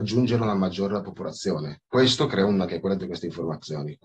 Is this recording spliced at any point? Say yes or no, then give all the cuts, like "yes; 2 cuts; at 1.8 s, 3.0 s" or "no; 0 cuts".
yes; 3 cuts; at 1.9 s, 2.7 s, 3.0 s